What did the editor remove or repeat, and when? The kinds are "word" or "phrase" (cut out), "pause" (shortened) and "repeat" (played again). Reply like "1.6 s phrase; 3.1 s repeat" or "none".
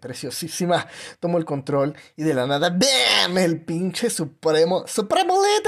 none